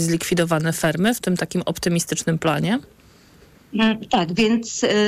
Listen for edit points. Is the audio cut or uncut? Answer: uncut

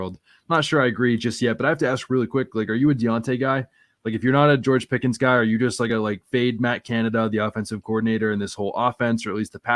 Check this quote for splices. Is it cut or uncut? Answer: uncut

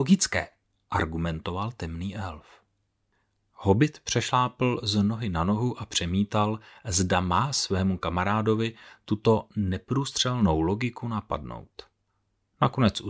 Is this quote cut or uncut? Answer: uncut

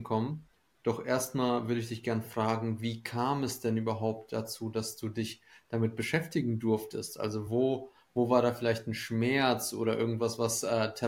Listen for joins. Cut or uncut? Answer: uncut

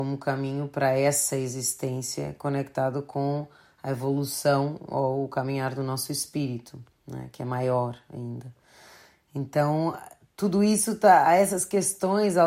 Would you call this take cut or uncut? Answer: uncut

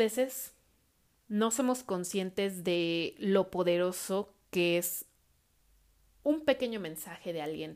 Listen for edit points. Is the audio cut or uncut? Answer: uncut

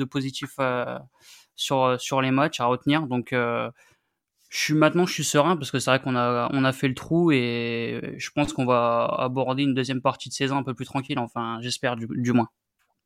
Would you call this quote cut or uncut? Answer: uncut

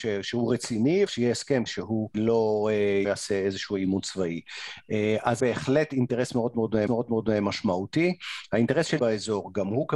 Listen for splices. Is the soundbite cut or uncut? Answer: cut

